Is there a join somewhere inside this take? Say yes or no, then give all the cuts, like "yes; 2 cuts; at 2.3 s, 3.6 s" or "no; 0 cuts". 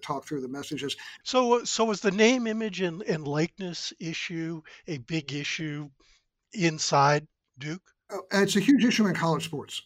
no; 0 cuts